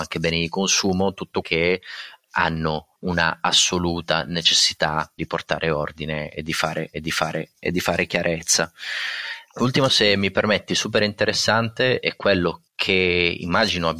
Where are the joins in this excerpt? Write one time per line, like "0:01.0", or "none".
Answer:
0:01.4
0:03.0
0:05.2
0:06.9
0:09.9
0:12.7